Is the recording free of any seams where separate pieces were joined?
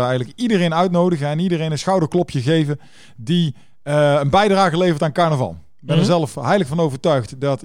yes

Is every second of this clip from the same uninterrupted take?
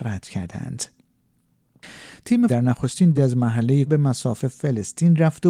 no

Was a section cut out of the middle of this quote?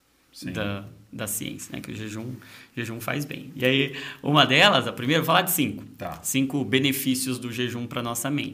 no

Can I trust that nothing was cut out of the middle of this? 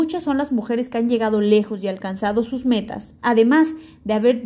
no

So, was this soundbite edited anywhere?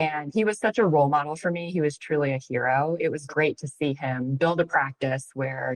no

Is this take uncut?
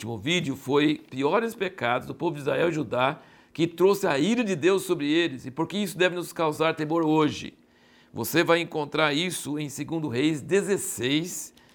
no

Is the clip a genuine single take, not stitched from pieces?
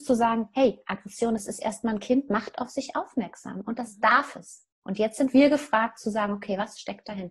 no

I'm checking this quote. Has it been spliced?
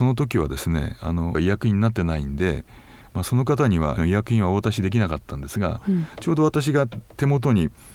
yes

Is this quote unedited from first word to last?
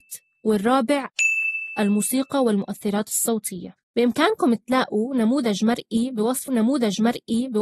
no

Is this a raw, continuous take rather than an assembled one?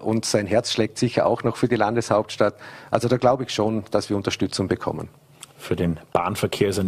yes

